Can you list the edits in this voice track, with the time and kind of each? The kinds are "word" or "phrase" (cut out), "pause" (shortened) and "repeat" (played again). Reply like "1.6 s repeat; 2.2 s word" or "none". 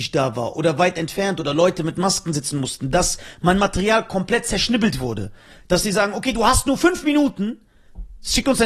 none